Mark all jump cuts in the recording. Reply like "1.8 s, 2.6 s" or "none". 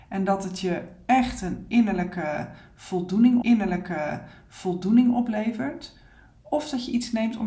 3.4 s